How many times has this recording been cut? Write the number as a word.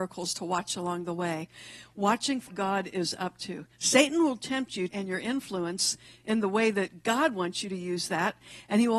three